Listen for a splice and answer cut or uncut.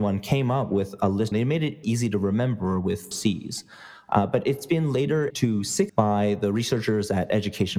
cut